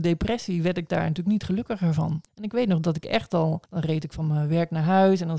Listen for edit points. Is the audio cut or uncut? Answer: cut